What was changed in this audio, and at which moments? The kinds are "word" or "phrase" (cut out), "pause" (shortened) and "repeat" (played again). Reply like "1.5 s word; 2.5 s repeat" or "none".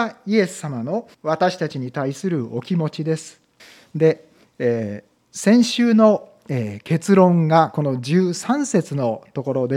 1.1 s pause; 3.6 s pause